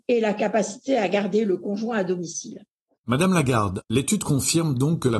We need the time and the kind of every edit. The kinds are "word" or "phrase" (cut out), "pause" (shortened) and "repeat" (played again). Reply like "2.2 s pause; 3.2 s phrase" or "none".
none